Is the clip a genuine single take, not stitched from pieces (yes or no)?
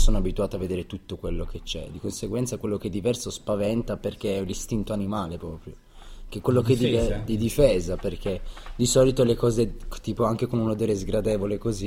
yes